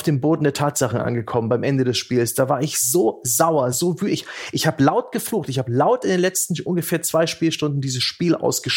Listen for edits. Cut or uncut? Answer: uncut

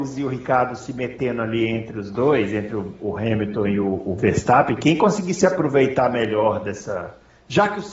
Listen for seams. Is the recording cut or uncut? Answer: uncut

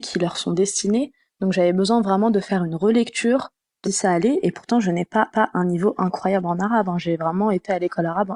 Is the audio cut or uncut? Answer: cut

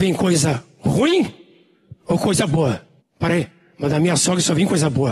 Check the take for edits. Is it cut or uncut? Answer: cut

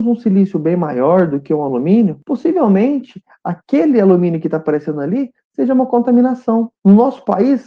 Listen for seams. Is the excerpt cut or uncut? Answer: uncut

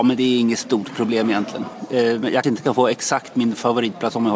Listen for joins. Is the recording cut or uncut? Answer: cut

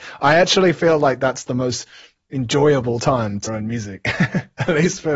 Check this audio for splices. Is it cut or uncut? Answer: cut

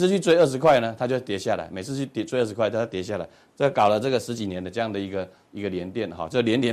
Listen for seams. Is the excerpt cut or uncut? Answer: uncut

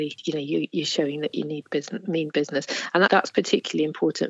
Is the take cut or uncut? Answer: cut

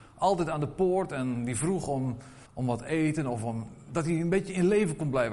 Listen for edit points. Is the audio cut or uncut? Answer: cut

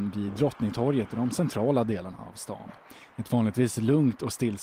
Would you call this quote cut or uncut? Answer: uncut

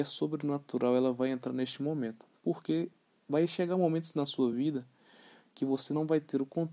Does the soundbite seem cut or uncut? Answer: uncut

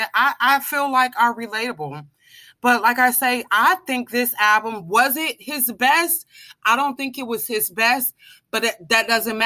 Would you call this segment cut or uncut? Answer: uncut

